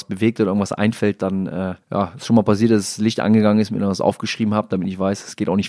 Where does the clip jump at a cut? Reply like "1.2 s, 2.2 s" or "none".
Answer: 1.8 s